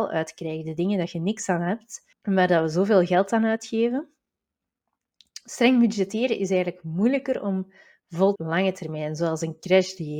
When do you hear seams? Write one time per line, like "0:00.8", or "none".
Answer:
0:02.1
0:08.4